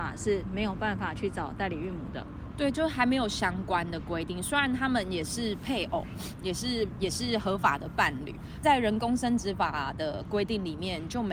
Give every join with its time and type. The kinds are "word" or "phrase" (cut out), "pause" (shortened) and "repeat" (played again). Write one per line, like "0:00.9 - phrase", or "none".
0:08.6 - phrase